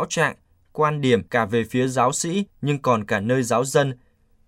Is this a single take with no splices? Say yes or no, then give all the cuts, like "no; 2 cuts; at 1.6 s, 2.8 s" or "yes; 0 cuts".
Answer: no; 2 cuts; at 1.3 s, 2.5 s